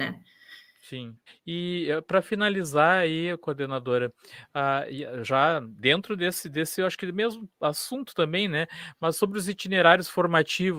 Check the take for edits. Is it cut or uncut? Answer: cut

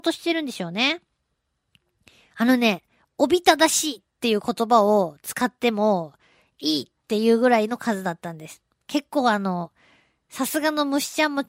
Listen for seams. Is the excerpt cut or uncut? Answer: uncut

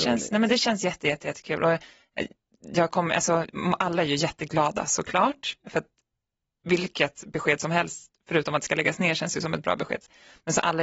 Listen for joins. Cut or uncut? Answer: uncut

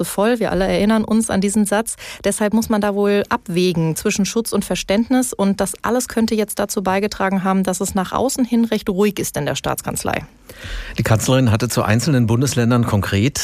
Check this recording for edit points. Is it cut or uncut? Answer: uncut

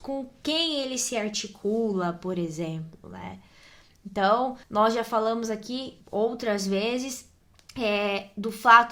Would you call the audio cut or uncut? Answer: cut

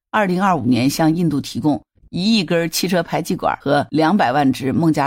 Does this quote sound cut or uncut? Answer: uncut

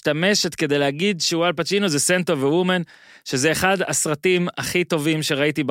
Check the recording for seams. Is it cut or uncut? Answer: uncut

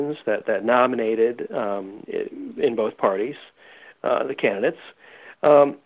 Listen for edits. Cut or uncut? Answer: cut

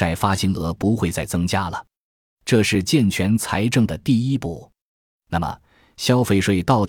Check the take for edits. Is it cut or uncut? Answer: uncut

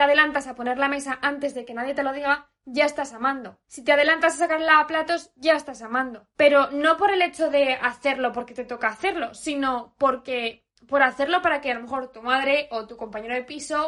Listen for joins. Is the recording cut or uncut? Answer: cut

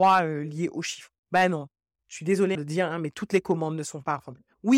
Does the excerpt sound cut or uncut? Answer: cut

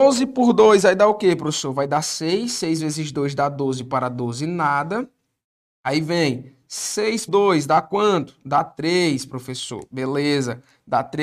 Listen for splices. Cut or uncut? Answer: cut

